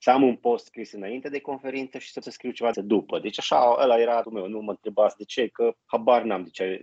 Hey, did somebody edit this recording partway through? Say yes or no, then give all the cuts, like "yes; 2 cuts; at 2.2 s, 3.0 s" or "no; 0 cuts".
yes; 4 cuts; at 2.2 s, 2.7 s, 4.2 s, 5.8 s